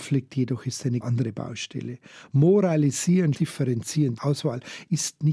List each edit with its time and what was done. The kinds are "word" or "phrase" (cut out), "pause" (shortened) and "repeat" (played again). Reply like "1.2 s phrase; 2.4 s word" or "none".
1.0 s word; 3.3 s word; 4.2 s word